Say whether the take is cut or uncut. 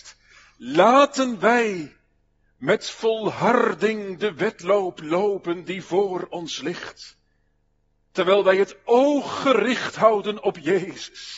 uncut